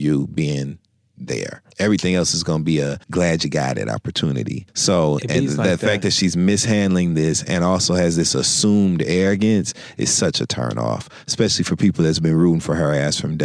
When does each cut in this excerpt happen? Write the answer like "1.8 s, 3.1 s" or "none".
1.7 s, 3.0 s, 4.7 s